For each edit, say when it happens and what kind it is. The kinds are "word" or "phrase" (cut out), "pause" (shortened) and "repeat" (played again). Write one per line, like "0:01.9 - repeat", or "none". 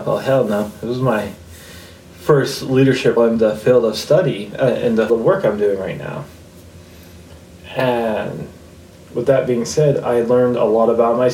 0:03.2 - word
0:05.1 - word